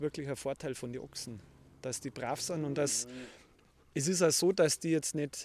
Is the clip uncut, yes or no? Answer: yes